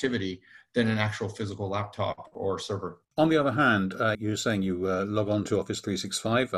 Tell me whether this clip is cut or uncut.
cut